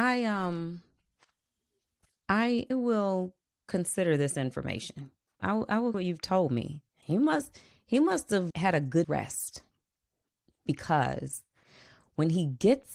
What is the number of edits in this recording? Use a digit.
6